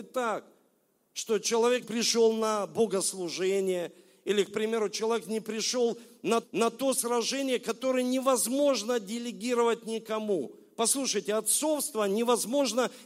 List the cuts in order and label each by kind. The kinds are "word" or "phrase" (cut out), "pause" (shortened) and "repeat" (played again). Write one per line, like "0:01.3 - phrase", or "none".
0:01.8 - word
0:06.4 - repeat